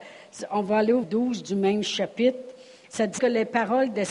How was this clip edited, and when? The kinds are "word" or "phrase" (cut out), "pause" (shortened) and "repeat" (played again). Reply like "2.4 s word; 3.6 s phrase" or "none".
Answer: 1.0 s word; 3.2 s word